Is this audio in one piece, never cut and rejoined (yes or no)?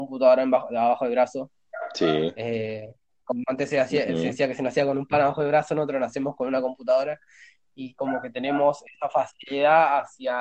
yes